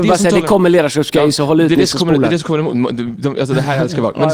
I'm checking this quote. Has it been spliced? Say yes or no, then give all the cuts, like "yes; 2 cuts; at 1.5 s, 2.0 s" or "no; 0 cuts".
no; 0 cuts